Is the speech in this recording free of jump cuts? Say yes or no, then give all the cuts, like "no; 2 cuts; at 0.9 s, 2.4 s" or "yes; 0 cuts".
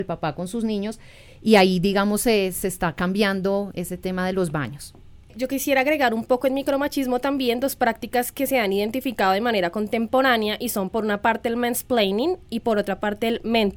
yes; 0 cuts